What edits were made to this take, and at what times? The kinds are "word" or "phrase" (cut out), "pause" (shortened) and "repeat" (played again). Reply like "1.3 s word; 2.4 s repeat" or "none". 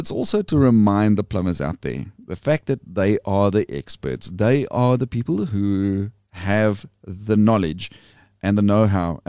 none